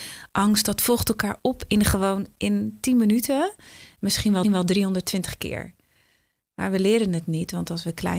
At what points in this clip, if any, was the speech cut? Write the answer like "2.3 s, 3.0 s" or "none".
4.4 s

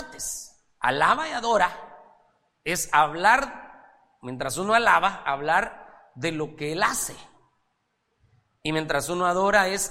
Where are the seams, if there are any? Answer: none

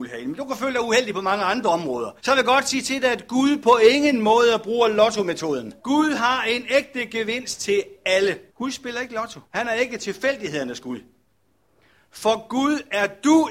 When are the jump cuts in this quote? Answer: 2.2 s, 5.8 s, 8.5 s, 9.5 s

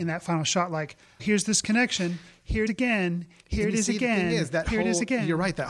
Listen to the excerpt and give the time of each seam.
1.2 s, 2.7 s

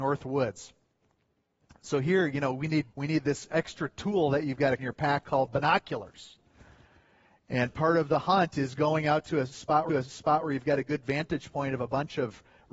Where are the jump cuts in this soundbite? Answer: 2.9 s, 4.8 s, 9.9 s

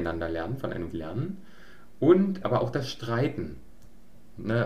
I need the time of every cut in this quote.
0.9 s, 2.4 s

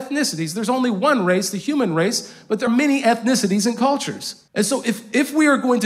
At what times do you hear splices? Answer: 2.7 s, 4.5 s

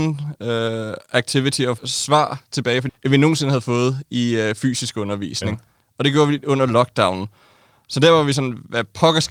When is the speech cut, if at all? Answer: 1.8 s, 2.9 s

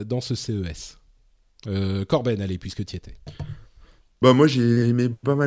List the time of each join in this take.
none

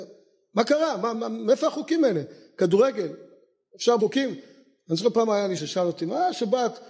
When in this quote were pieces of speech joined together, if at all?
1.1 s, 4.0 s, 5.6 s

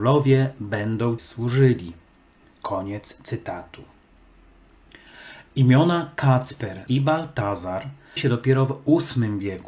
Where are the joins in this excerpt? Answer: 1.2 s, 6.9 s, 8.2 s

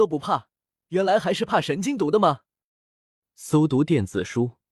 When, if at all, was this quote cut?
none

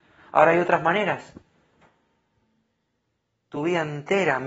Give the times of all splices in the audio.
none

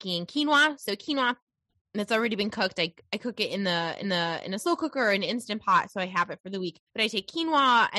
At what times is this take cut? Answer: 4.0 s, 6.9 s

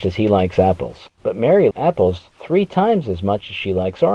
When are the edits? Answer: 1.7 s

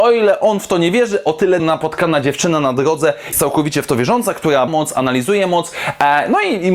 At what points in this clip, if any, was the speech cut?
1.6 s, 3.3 s, 4.7 s

